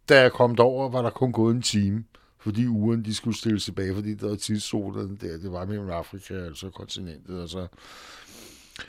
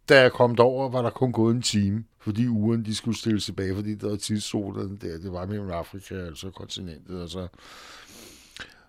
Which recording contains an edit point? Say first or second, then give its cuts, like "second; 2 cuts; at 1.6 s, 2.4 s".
second; 1 cut; at 2.1 s